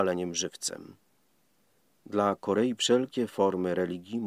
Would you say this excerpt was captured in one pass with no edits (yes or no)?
no